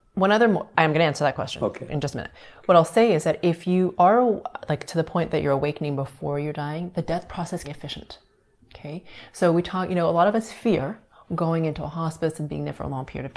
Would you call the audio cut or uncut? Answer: cut